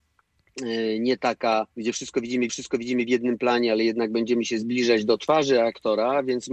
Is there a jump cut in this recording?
yes; 2 cuts; at 1.7 s, 2.5 s

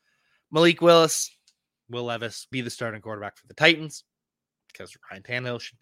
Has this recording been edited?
yes; 1 cut; at 2.5 s

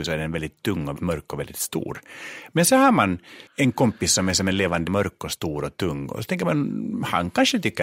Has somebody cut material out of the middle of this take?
yes; 3 cuts; at 1.0 s, 3.5 s, 4.9 s

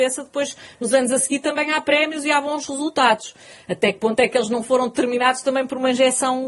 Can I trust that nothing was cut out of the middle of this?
yes; 0 cuts

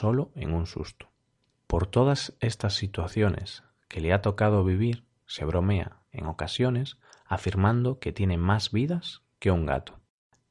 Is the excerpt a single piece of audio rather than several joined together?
yes; 0 cuts

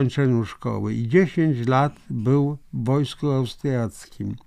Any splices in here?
no; 0 cuts

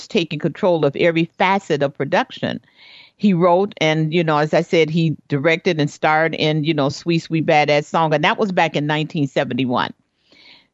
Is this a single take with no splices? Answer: yes; 0 cuts

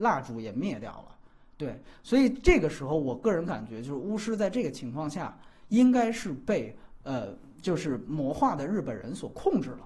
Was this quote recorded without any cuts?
yes; 0 cuts

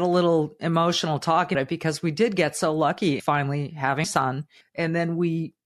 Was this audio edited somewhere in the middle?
yes; 4 cuts; at 1.5 s, 3.2 s, 4.0 s, 4.6 s

